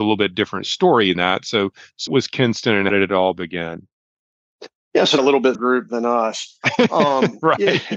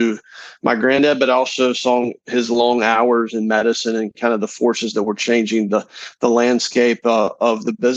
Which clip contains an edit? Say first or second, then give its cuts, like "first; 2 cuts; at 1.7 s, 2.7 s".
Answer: first; 5 cuts; at 1.1 s, 2.1 s, 2.9 s, 5.2 s, 5.5 s